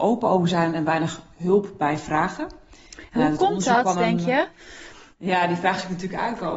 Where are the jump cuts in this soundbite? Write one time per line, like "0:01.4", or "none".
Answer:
none